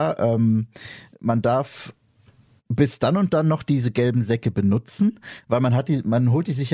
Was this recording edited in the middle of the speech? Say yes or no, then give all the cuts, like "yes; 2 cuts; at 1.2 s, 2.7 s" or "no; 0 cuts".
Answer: no; 0 cuts